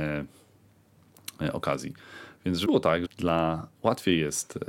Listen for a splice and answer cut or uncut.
cut